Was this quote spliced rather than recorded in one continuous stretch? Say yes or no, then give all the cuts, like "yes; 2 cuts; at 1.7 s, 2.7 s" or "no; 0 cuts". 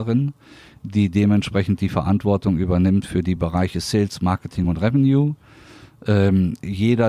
no; 0 cuts